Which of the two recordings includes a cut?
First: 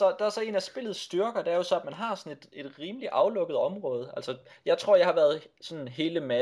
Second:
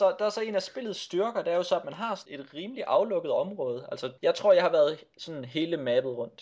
second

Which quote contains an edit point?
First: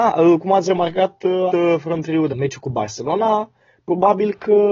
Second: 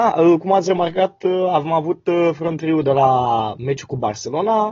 first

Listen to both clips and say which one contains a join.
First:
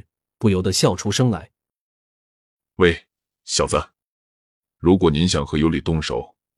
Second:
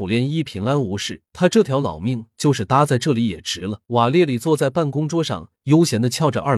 second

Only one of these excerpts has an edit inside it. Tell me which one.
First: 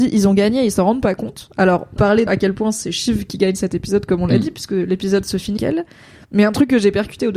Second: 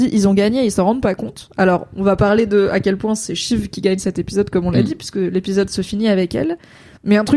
first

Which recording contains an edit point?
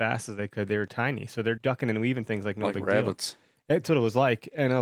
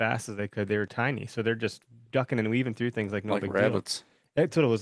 first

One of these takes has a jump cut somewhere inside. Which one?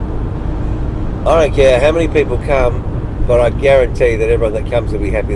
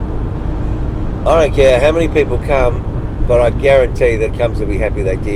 second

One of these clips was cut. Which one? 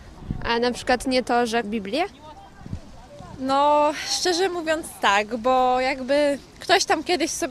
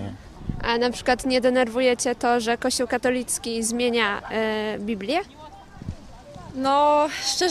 first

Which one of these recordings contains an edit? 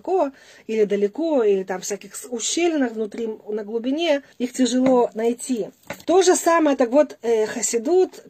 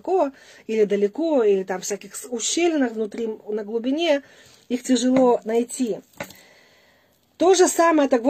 first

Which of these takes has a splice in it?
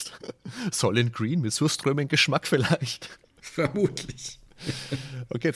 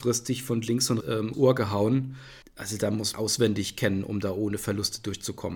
second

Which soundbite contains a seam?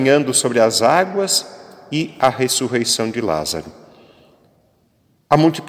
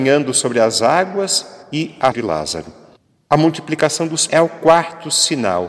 second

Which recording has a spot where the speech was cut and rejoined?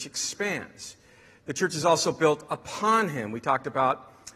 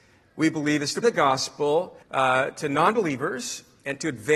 second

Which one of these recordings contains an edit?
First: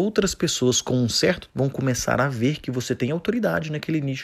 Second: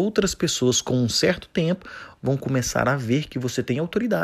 first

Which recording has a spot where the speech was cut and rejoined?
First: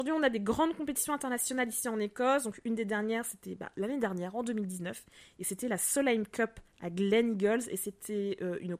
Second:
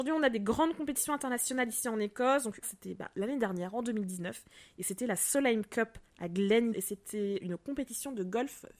second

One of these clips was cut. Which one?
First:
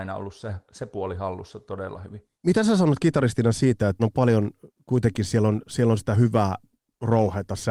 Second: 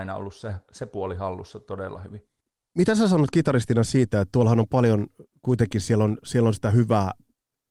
first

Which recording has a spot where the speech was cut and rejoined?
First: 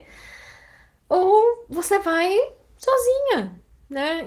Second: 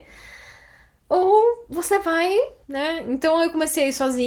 second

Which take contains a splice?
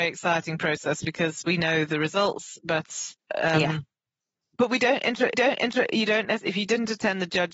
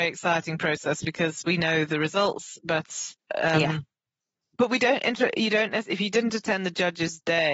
first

